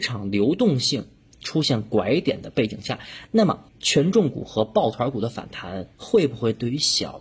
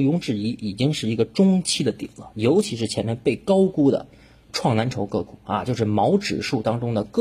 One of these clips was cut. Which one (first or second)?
first